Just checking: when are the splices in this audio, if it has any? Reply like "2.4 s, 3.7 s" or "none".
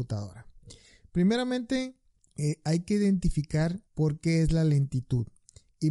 2.2 s, 3.9 s